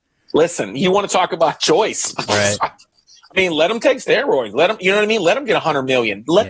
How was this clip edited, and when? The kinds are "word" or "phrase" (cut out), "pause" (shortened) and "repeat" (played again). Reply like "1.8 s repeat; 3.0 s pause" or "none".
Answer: none